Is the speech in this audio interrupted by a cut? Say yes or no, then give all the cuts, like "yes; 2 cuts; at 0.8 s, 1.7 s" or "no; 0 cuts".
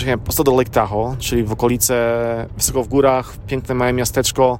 no; 0 cuts